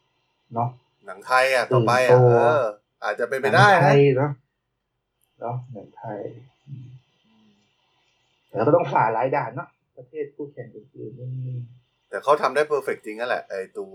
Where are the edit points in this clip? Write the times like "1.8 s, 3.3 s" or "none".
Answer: none